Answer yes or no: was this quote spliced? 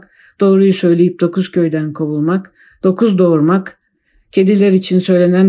no